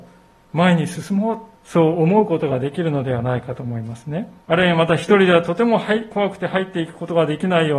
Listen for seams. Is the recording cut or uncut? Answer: cut